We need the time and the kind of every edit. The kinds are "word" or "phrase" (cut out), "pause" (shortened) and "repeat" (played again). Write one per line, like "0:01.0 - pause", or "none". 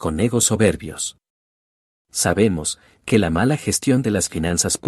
none

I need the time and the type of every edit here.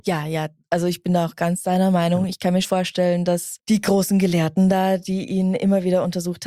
0:02.6 - word
0:03.6 - pause

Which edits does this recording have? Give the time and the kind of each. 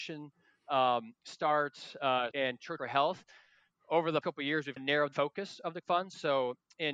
0:02.3 - word
0:02.8 - word
0:04.2 - word
0:04.8 - word
0:05.1 - word
0:05.8 - word

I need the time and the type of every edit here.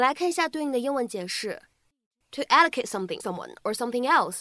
0:03.2 - word

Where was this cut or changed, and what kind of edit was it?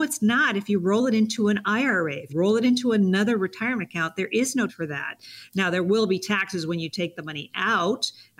0:02.3 - word
0:04.7 - word

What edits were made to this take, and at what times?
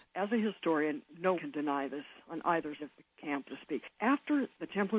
0:01.3 - word
0:02.8 - word
0:03.5 - word

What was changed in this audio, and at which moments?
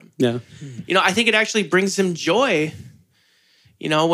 none

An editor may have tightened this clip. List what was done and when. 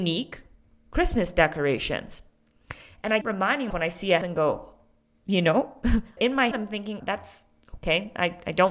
0:03.2 - word
0:03.7 - word
0:04.2 - word
0:05.2 - word
0:06.2 - word
0:06.5 - word
0:07.0 - word

